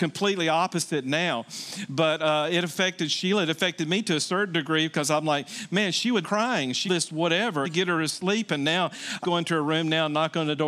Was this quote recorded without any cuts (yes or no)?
no